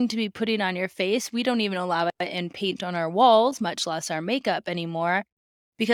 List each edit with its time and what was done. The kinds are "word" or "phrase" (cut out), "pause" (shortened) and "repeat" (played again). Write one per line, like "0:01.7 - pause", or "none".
none

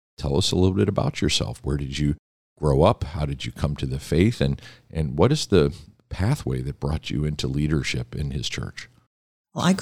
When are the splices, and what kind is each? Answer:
none

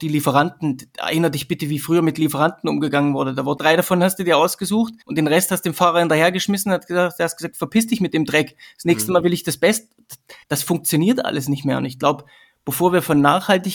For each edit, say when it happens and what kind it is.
0:03.6 - phrase
0:05.0 - pause
0:10.4 - pause

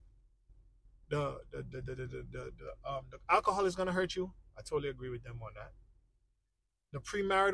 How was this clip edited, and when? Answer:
none

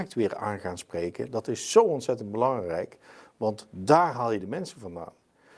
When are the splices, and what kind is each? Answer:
none

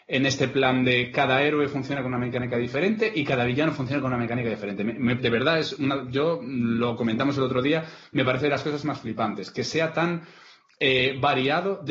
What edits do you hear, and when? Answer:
0:05.2 - word

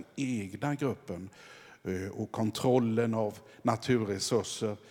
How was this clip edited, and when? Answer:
none

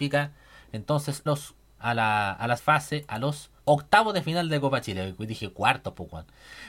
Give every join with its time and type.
0:01.3 - word
0:01.8 - word
0:02.6 - word
0:03.6 - pause

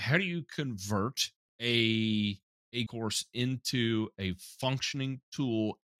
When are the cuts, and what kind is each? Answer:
0:01.4 - pause
0:02.9 - word

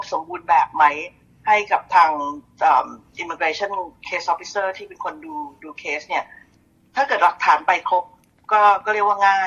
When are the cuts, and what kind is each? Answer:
none

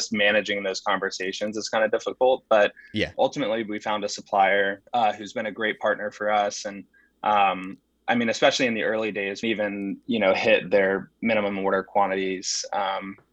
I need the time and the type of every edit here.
0:03.1 - word
0:04.9 - pause
0:07.8 - pause
0:09.4 - phrase

